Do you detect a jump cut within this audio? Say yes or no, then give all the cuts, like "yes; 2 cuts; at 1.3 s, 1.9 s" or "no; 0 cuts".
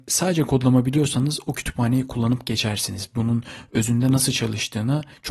no; 0 cuts